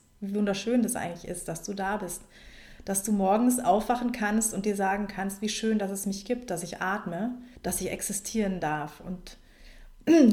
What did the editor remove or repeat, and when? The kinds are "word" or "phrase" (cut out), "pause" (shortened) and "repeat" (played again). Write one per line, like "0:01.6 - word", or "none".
0:07.6 - pause

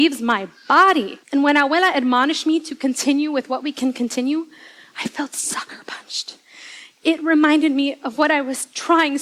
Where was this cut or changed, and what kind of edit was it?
0:01.2 - pause

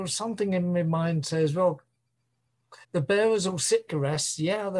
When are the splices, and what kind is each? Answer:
0:02.8 - pause
0:03.9 - phrase

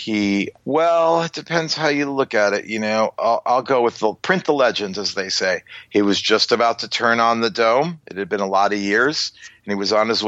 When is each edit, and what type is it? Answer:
none

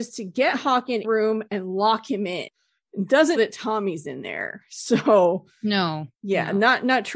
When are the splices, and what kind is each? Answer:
0:01.0 - phrase
0:03.4 - word
0:06.1 - pause

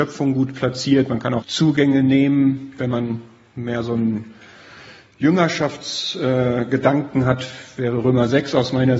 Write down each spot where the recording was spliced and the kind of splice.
0:01.4 - word

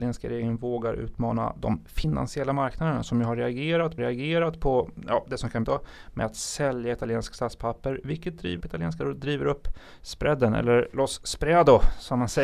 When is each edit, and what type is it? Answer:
0:04.0 - repeat
0:05.6 - phrase
0:08.6 - word
0:09.0 - word

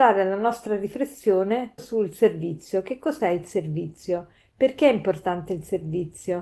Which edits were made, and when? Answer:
0:01.8 - word

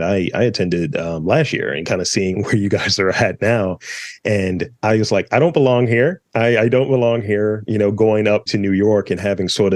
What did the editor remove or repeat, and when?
0:02.3 - word
0:04.8 - pause
0:08.5 - word

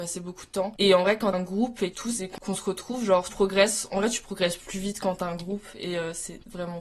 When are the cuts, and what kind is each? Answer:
0:01.3 - word
0:01.9 - phrase
0:03.3 - word

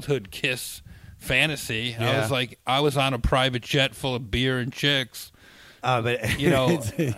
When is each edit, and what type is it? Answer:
none

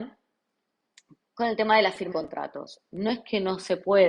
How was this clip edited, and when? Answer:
0:02.1 - word

